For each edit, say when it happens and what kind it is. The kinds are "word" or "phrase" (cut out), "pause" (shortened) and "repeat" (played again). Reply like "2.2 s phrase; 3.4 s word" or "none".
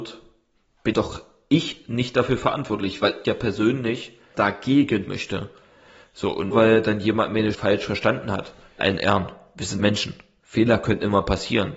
0.9 s word; 3.2 s word; 4.3 s word; 5.1 s word; 6.5 s word; 7.5 s word; 8.8 s word; 9.8 s word